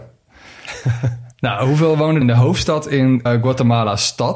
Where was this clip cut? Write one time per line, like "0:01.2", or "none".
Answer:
0:01.3
0:02.2
0:03.3

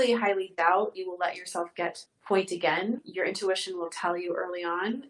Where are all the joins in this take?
0:00.9
0:02.1

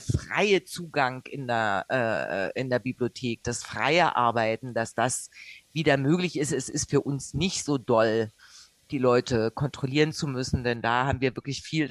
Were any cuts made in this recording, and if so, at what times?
none

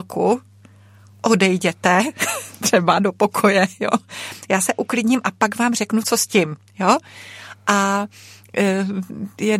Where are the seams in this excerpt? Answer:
none

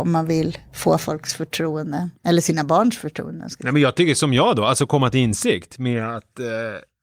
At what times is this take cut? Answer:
0:02.2

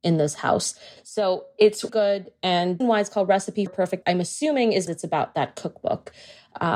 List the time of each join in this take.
0:01.9
0:02.8
0:03.7
0:04.0
0:04.9

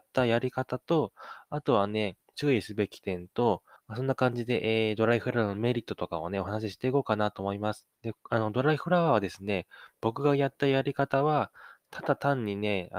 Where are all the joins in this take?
0:02.3
0:03.8
0:07.9

